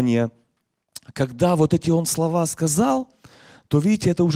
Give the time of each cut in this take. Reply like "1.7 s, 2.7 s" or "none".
none